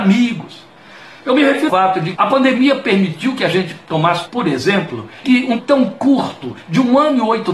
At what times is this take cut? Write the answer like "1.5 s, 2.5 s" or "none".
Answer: 1.7 s, 2.1 s, 4.3 s, 5.2 s, 5.6 s